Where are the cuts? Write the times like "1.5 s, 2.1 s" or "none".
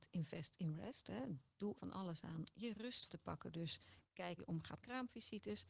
1.8 s, 2.5 s, 3.1 s, 4.4 s, 4.8 s